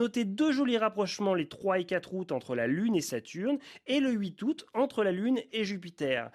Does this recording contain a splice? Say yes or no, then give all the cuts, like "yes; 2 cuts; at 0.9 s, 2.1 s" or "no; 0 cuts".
no; 0 cuts